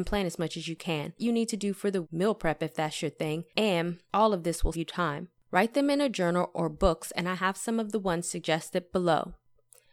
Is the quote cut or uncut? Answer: cut